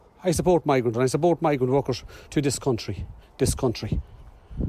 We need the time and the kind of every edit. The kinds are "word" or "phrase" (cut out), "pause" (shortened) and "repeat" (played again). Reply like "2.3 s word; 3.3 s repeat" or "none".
0.9 s word; 2.3 s word; 3.2 s word